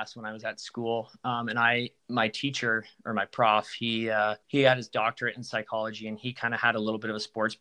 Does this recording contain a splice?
yes; 2 cuts; at 2.0 s, 4.4 s

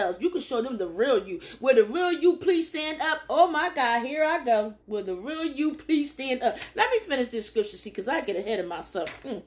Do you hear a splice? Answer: yes; 1 cut; at 4.8 s

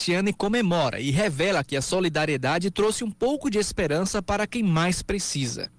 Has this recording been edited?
no; 0 cuts

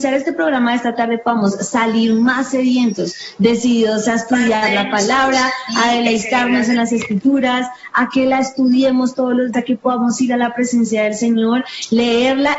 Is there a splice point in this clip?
yes; 1 cut; at 9.5 s

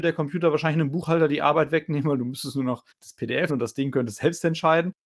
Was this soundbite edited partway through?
yes; 2 cuts; at 2.9 s, 3.5 s

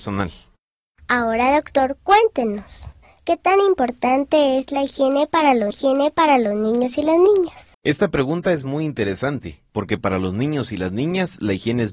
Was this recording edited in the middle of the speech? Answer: yes; 2 cuts; at 5.7 s, 7.7 s

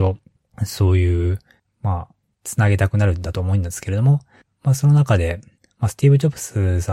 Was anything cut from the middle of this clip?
no; 0 cuts

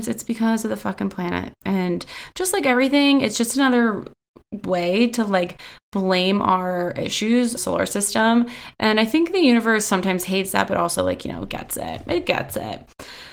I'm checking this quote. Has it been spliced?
yes; 1 cut; at 7.6 s

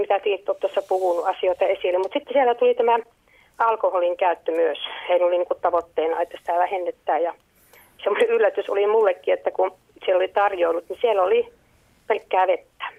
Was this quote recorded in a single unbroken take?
yes; 0 cuts

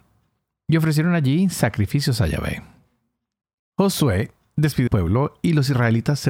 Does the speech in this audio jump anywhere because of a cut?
yes; 1 cut; at 4.9 s

